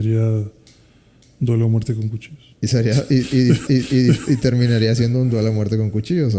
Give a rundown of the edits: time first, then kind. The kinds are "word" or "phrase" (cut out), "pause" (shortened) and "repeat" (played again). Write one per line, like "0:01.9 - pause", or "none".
0:03.7 - repeat